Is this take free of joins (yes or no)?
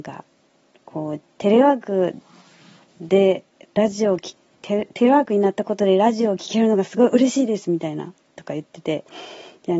yes